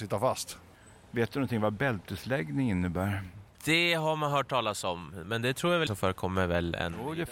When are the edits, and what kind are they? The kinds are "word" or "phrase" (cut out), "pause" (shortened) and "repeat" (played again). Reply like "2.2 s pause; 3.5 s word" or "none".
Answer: 3.5 s pause; 5.9 s word